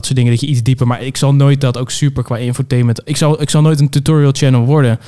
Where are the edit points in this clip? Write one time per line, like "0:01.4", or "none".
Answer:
none